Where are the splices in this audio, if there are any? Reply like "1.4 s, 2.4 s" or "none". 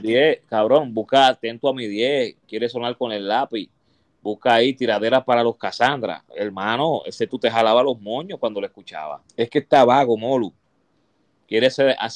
2.4 s, 7.3 s, 9.3 s